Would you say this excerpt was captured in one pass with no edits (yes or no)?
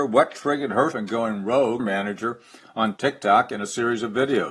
no